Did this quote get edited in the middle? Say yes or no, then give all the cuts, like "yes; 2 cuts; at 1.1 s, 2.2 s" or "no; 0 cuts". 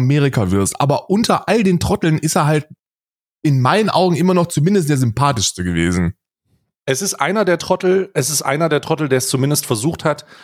no; 0 cuts